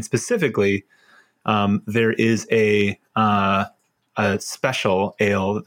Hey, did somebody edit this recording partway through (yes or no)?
no